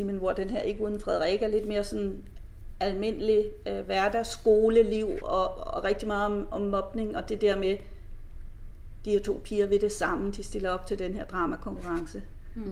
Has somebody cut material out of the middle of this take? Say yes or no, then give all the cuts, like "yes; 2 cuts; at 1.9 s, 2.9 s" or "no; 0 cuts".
no; 0 cuts